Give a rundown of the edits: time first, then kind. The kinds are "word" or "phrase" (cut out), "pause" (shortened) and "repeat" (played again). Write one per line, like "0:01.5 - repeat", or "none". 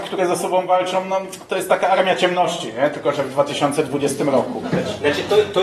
none

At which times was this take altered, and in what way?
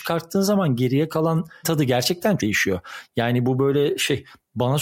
0:01.6 - word
0:02.4 - word

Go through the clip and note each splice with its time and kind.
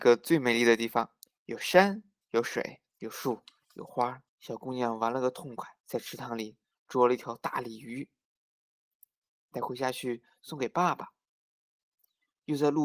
0:01.2 - pause
0:02.2 - pause
0:04.3 - pause
0:05.8 - pause

